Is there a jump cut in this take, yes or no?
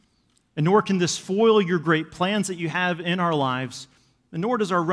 no